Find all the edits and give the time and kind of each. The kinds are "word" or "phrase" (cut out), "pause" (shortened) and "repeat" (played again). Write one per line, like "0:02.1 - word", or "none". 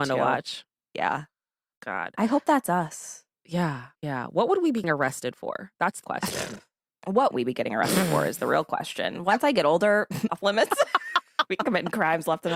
0:03.9 - pause
0:04.8 - word
0:06.0 - word
0:07.3 - word
0:10.3 - word
0:11.5 - word